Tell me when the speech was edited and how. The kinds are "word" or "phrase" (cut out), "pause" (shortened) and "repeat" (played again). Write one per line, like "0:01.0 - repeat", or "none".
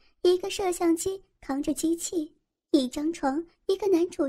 none

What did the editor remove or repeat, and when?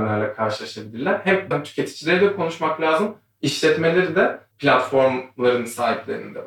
0:01.5 - word
0:04.5 - word

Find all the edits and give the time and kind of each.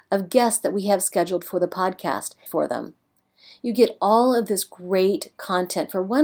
0:02.5 - phrase

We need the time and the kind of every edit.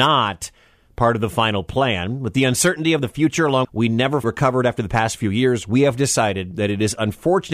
0:03.6 - word
0:04.2 - word

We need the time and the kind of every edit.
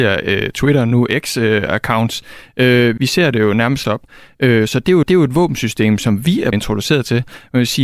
0:03.0 - word
0:03.8 - phrase
0:05.0 - repeat
0:06.5 - word

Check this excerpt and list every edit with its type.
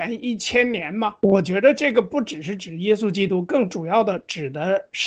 0:01.2 - pause

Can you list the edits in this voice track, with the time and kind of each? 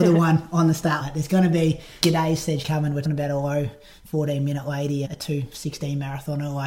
0:01.0 - word
0:02.0 - word
0:02.6 - word
0:03.0 - word
0:05.0 - word

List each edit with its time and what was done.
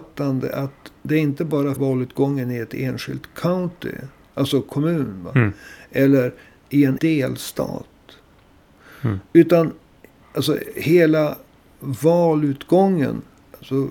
0:01.8 - word
0:07.0 - word

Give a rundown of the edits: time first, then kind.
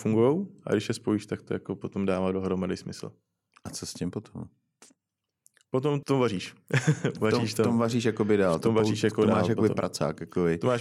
0:06.0 - word

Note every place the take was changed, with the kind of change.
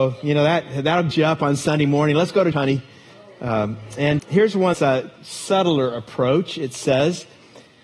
0:01.1 - word
0:02.5 - word
0:04.2 - word
0:04.7 - word

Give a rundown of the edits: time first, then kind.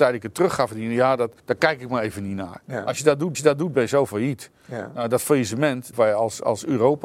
0:01.4 - pause
0:03.3 - repeat
0:05.9 - phrase

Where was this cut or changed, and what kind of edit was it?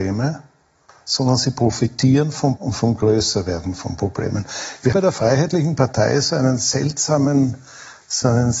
0:02.6 - word
0:04.9 - word

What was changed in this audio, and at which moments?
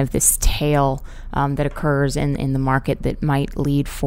none

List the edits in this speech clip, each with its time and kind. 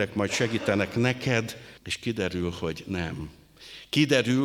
0:01.8 - pause

